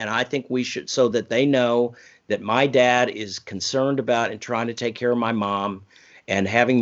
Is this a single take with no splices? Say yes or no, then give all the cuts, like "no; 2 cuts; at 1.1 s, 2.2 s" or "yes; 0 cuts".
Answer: yes; 0 cuts